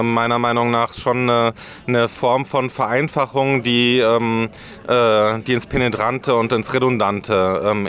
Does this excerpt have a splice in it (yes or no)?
no